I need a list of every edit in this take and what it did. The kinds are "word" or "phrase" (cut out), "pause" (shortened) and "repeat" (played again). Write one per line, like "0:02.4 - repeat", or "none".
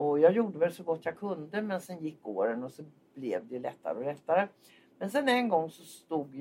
none

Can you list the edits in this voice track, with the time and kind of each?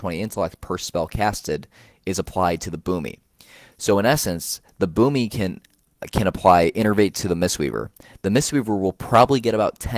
none

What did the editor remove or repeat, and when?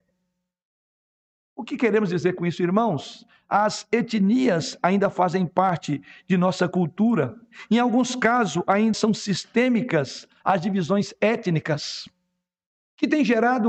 0:08.9 - word

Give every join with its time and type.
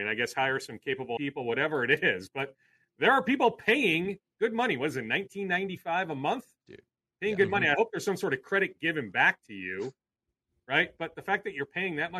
0:01.2 - word

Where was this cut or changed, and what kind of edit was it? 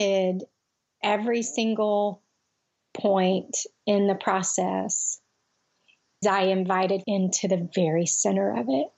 0:01.0 - word
0:06.2 - word
0:07.0 - word

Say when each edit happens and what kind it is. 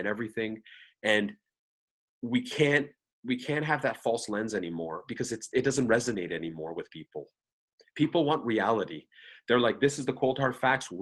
none

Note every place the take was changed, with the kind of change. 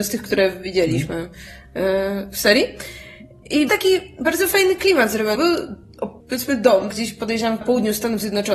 0:03.7 - word
0:05.4 - word
0:06.2 - pause
0:06.9 - word
0:07.6 - word

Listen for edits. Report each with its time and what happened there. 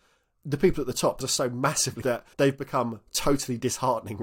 0:01.2 - word
0:02.0 - word
0:02.3 - pause

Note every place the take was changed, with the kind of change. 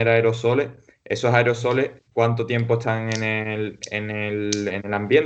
0:02.1 - word

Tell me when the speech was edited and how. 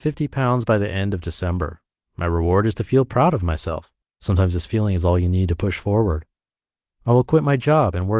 none

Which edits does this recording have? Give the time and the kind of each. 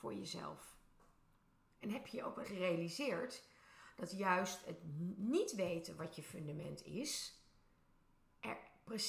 0:01.4 - pause
0:02.4 - word

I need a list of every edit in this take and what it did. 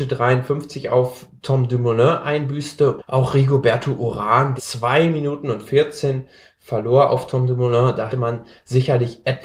0:03.0 - word
0:04.6 - word
0:08.1 - word

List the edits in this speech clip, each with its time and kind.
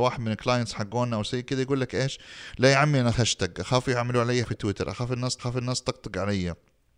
0:03.1 - word
0:04.4 - word
0:05.4 - repeat

